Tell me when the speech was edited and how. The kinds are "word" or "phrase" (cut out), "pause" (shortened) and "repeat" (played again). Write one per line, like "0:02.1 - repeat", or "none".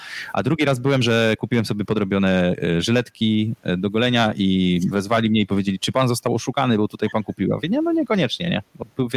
none